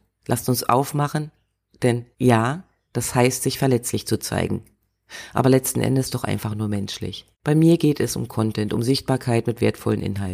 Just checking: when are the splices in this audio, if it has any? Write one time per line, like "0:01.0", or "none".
0:02.1
0:07.3